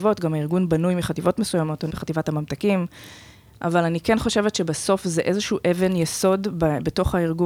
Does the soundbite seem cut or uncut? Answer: cut